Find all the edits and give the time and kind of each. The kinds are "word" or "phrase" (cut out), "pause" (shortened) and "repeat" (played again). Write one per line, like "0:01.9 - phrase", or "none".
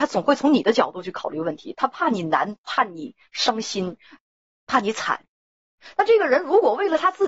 0:02.6 - phrase